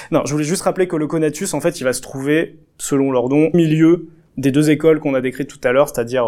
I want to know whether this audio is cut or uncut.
cut